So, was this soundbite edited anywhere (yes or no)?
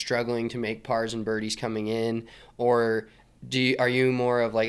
no